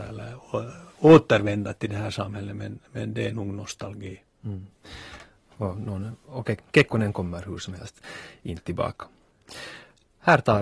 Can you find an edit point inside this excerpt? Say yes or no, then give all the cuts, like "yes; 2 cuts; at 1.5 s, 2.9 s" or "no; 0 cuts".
no; 0 cuts